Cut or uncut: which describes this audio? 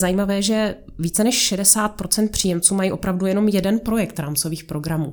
uncut